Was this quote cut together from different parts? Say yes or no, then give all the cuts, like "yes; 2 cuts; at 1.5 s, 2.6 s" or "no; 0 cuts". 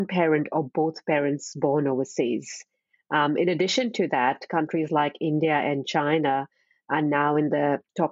no; 0 cuts